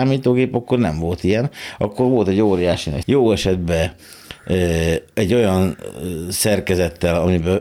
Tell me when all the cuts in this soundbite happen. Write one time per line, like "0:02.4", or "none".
0:03.0